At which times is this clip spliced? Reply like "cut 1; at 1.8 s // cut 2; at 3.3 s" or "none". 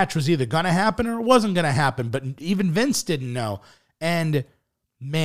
none